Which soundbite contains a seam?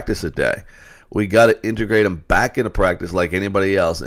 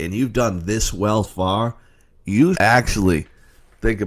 second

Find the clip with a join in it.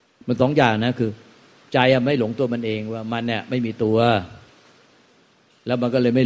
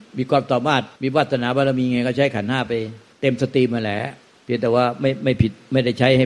second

